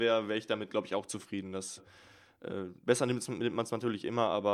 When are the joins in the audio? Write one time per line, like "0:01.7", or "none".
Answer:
0:01.8
0:02.8